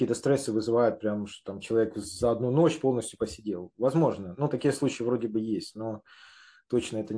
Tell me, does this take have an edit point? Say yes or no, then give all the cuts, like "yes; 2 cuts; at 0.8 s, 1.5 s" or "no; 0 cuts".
no; 0 cuts